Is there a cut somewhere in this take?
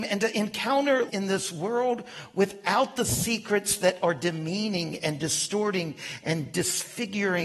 yes; 1 cut; at 1.1 s

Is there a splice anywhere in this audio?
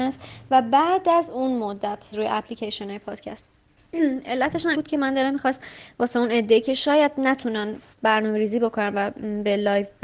yes; 2 cuts; at 2.1 s, 4.7 s

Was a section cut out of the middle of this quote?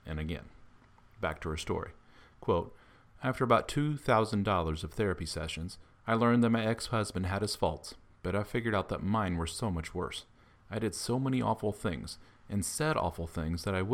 no; 0 cuts

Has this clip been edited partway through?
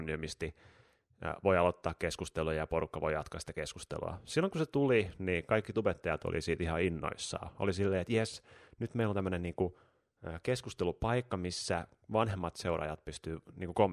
no; 0 cuts

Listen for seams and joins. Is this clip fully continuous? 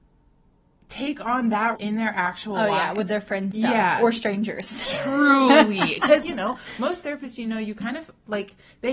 no; 3 cuts; at 1.8 s, 3.5 s, 6.2 s

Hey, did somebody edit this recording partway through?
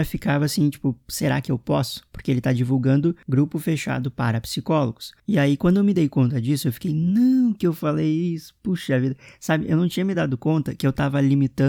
no; 0 cuts

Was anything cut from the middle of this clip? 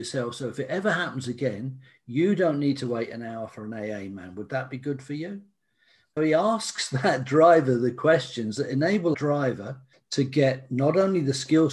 yes; 3 cuts; at 6.2 s, 9.1 s, 9.9 s

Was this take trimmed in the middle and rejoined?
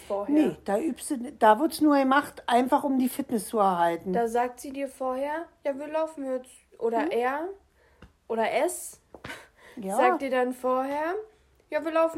no; 0 cuts

